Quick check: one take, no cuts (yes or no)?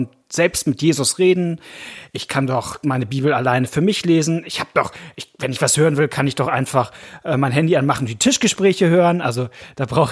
yes